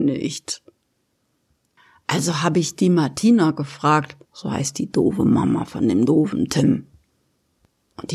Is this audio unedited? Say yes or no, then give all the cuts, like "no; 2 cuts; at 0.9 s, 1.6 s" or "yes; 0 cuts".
no; 1 cut; at 4.2 s